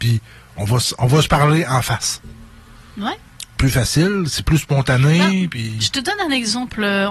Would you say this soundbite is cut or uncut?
uncut